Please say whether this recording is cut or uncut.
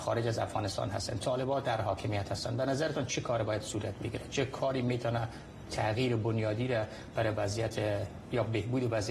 uncut